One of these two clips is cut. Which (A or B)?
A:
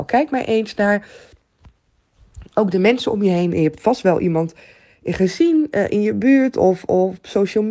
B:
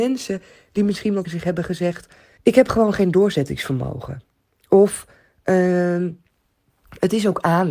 B